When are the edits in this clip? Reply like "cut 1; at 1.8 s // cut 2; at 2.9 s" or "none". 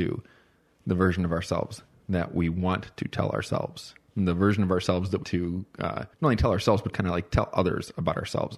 cut 1; at 5.2 s // cut 2; at 6.1 s // cut 3; at 6.9 s